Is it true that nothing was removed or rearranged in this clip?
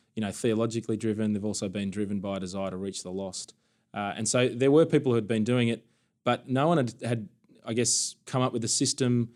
yes; 0 cuts

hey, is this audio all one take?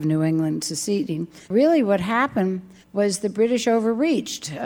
no; 2 cuts; at 1.4 s, 2.8 s

